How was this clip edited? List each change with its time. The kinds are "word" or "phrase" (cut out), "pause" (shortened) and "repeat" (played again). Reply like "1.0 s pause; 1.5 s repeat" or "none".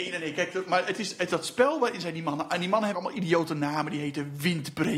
1.3 s word; 2.9 s word